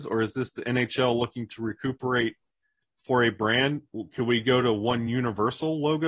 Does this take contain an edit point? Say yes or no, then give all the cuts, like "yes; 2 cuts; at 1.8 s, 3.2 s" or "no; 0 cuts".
no; 0 cuts